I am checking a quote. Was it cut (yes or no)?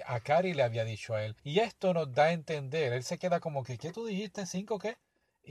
yes